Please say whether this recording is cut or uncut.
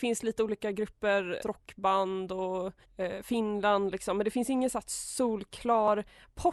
cut